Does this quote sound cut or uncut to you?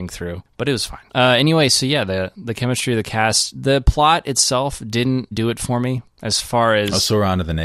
cut